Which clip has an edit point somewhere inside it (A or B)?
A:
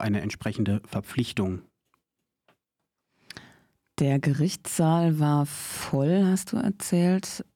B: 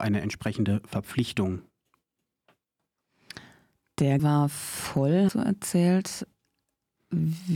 B